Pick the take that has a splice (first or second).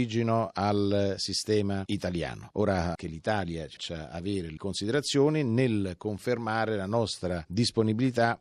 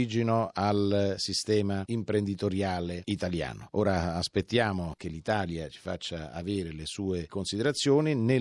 first